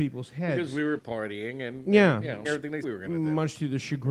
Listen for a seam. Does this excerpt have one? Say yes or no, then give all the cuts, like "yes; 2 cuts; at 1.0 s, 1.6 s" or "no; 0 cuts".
yes; 3 cuts; at 1.0 s, 2.4 s, 2.8 s